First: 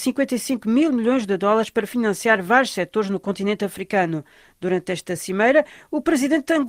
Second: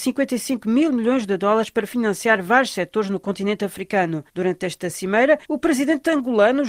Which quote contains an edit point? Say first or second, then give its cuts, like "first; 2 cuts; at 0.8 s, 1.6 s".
second; 2 cuts; at 4.3 s, 5.4 s